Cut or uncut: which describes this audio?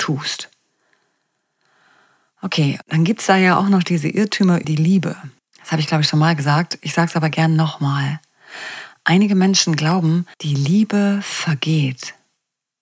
cut